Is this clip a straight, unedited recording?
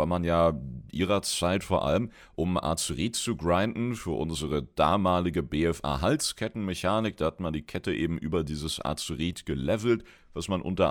yes; 0 cuts

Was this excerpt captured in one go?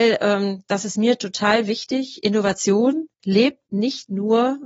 yes; 0 cuts

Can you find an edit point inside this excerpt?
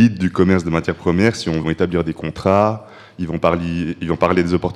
yes; 1 cut; at 1.6 s

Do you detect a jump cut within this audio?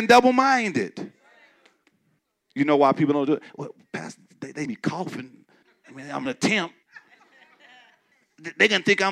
yes; 2 cuts; at 4.7 s, 6.3 s

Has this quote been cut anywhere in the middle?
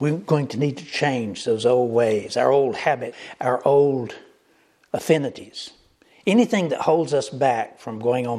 no; 0 cuts

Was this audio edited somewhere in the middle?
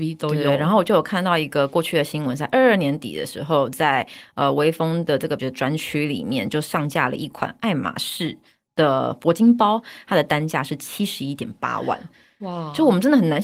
yes; 1 cut; at 5.4 s

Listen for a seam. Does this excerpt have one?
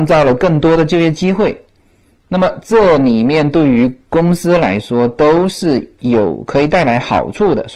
no; 0 cuts

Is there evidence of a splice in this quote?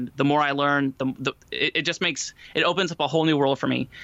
yes; 1 cut; at 1.4 s

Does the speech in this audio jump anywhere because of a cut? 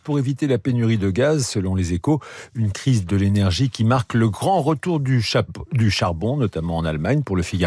no; 0 cuts

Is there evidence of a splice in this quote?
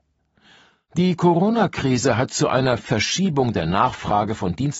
no; 0 cuts

